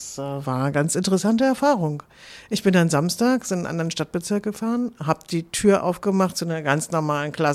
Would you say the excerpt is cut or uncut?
uncut